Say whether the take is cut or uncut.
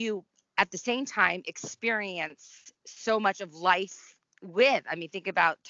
uncut